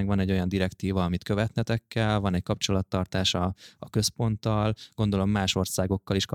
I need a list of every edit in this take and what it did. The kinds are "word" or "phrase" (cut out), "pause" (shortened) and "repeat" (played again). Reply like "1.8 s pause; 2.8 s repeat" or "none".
none